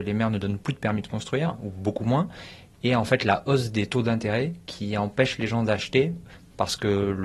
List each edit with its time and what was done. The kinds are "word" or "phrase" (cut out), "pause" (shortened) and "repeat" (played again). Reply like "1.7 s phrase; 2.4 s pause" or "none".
none